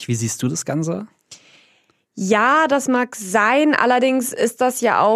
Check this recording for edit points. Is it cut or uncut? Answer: uncut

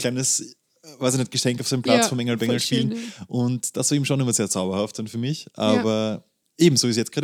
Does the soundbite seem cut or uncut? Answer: uncut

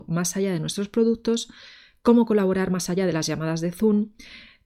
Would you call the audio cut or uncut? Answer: uncut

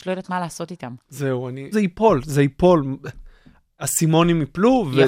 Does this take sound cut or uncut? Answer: cut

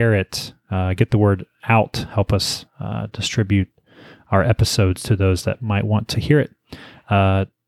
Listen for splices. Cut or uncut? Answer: uncut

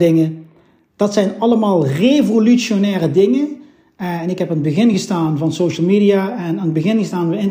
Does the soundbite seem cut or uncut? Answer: uncut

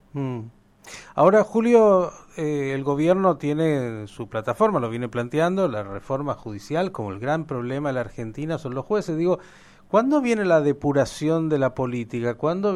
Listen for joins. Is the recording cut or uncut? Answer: uncut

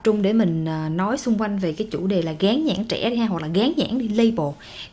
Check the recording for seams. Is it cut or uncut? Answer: uncut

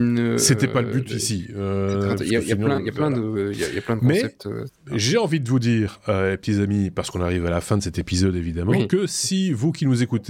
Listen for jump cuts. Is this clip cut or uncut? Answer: uncut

